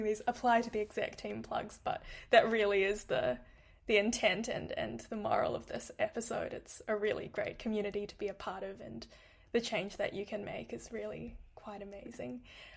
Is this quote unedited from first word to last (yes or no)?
yes